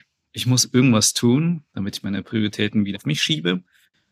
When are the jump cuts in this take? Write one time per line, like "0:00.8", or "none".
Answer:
0:02.9